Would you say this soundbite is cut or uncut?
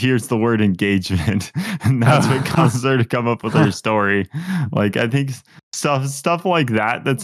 uncut